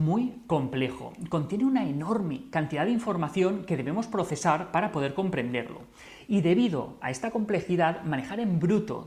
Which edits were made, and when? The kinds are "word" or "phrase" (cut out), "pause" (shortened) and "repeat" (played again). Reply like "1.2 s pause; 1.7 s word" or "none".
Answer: none